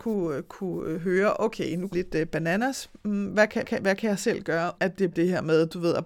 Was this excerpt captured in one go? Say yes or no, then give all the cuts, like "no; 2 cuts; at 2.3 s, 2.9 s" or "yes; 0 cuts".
no; 4 cuts; at 1.9 s, 3.6 s, 4.8 s, 5.1 s